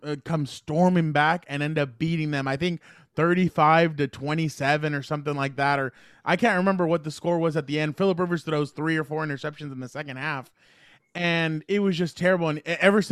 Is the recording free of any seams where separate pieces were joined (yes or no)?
yes